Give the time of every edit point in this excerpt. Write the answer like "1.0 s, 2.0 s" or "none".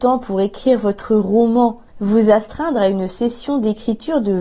1.9 s

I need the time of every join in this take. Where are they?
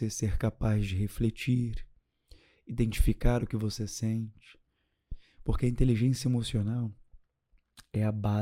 none

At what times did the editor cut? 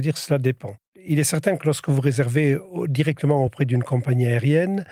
none

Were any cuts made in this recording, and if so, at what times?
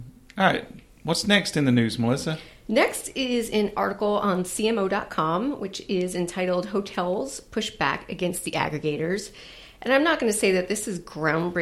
none

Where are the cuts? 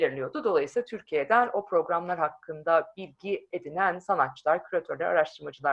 none

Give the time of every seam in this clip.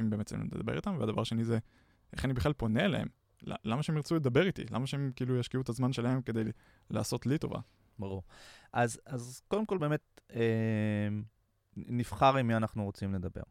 none

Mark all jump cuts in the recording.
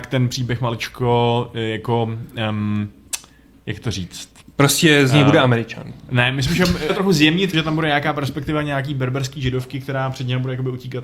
4.4 s, 6.9 s, 7.5 s

